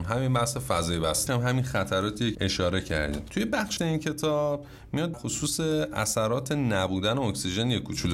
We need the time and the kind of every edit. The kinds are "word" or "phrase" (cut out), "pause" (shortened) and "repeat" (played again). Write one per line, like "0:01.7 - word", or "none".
0:01.3 - phrase
0:02.3 - word
0:03.8 - word
0:05.1 - word